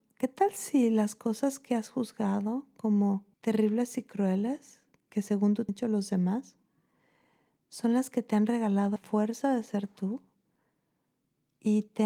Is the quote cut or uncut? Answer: cut